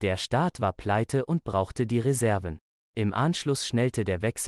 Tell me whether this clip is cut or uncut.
uncut